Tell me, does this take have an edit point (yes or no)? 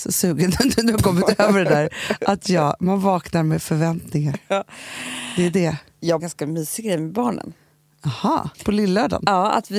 yes